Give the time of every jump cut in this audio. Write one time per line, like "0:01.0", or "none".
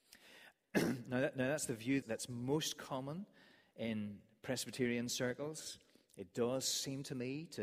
0:02.0

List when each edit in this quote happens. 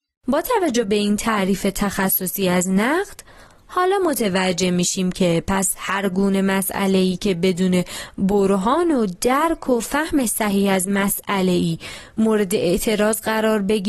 none

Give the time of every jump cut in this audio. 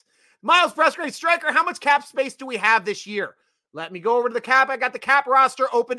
none

